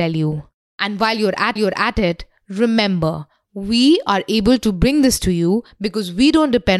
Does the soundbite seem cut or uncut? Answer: cut